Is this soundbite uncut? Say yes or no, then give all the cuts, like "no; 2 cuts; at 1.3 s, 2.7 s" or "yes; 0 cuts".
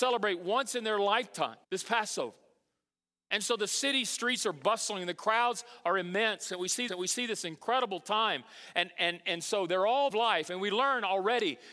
no; 3 cuts; at 1.6 s, 6.9 s, 10.1 s